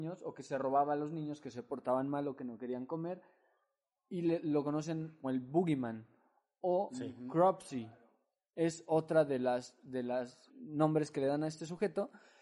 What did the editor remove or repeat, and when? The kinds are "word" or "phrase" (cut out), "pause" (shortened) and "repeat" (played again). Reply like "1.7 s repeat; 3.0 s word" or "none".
5.2 s word; 10.5 s word